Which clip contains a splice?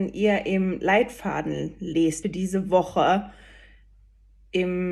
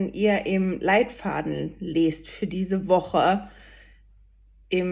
first; 1 cut; at 2.2 s

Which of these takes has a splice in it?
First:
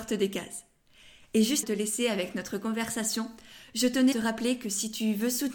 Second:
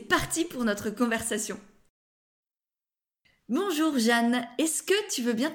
first; 2 cuts; at 1.6 s, 4.1 s

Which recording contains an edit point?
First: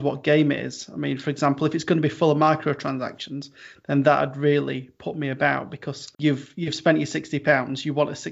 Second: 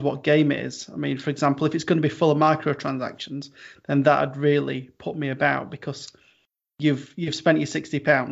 first; 1 cut; at 6.1 s

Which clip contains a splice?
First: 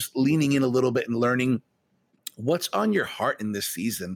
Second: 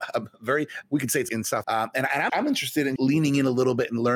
second; 4 cuts; at 1.3 s, 1.6 s, 2.3 s, 3.0 s

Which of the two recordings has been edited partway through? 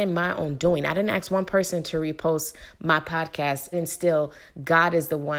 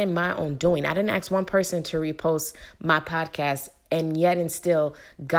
first; 1 cut; at 3.7 s

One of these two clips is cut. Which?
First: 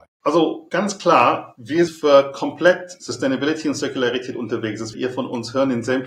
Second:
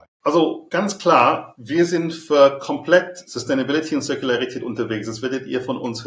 first; 2 cuts; at 1.9 s, 4.9 s

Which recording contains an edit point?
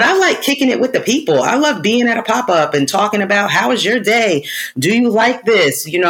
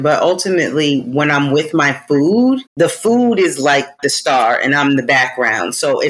second; 1 cut; at 2.7 s

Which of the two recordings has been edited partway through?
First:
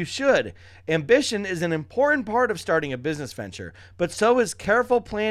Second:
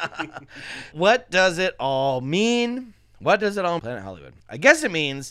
second; 3 cuts; at 0.9 s, 3.8 s, 4.4 s

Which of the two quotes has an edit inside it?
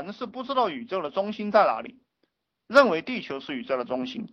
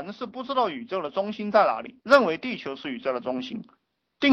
second; 1 cut; at 2.0 s

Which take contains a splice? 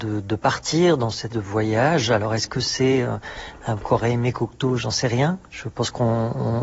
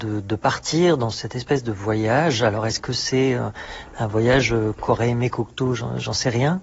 first; 3 cuts; at 1.3 s, 3.8 s, 4.8 s

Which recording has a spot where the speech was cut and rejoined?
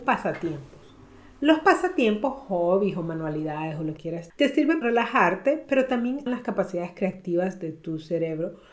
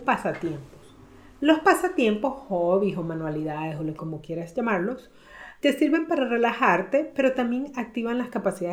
first; 4 cuts; at 4.0 s, 4.3 s, 4.8 s, 6.3 s

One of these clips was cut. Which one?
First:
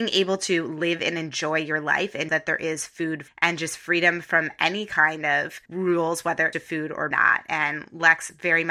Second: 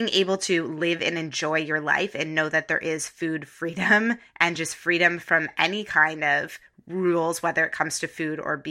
first; 5 cuts; at 2.3 s, 3.3 s, 5.6 s, 6.5 s, 7.1 s

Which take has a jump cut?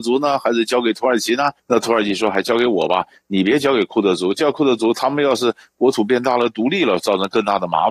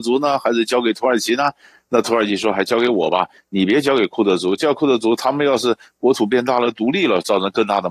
first; 1 cut; at 1.6 s

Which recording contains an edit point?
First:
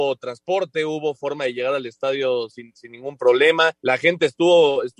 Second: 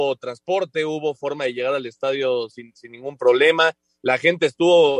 first; 1 cut; at 3.8 s

